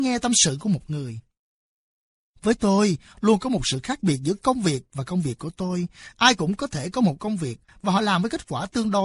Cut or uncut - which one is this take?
uncut